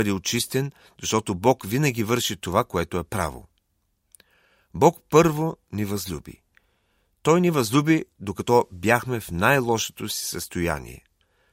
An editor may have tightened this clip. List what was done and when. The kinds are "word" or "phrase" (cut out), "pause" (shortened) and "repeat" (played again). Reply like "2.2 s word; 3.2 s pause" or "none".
none